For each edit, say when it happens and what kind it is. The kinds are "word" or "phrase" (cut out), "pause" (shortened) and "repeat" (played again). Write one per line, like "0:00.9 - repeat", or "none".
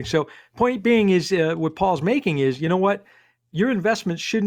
none